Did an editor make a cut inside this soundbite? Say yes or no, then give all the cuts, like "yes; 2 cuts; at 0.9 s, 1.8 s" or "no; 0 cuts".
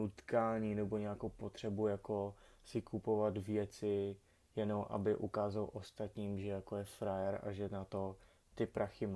no; 0 cuts